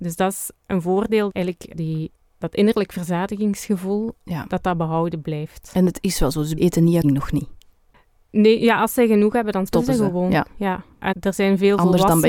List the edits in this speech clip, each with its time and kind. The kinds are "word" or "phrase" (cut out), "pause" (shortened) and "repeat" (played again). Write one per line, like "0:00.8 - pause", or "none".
0:01.3 - word
0:01.7 - word
0:06.6 - word
0:07.0 - word
0:09.7 - word
0:11.1 - word